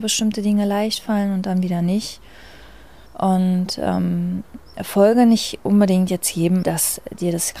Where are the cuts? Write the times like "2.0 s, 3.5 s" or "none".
3.1 s, 6.6 s

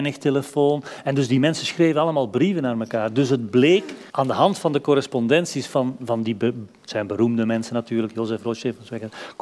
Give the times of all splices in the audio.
4.1 s

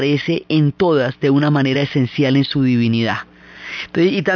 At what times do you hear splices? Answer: none

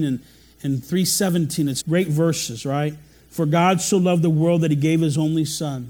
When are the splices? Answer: 1.8 s

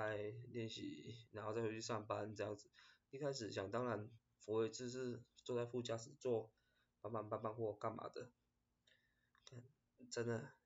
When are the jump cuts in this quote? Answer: none

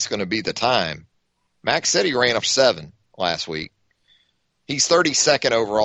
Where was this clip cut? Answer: 2.4 s

